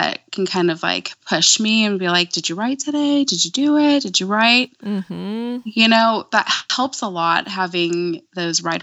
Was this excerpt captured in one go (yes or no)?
yes